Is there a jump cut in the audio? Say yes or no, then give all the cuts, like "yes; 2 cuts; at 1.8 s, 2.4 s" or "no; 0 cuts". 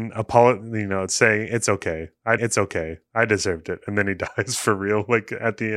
yes; 1 cut; at 2.4 s